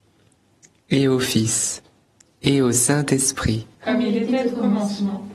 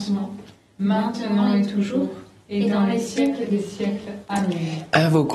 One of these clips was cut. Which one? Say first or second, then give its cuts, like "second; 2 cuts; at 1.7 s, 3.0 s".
first; 2 cuts; at 2.1 s, 3.7 s